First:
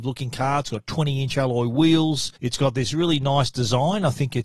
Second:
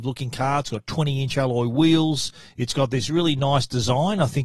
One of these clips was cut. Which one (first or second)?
first